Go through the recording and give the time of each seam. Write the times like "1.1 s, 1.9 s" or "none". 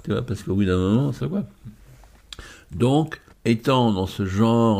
1.2 s, 3.3 s

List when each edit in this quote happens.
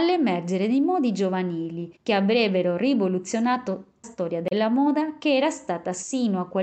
2.0 s, 4.0 s

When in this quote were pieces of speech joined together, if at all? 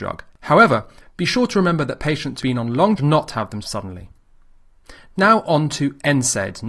2.4 s, 3.0 s, 3.6 s

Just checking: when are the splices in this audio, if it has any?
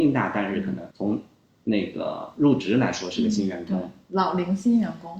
0.9 s

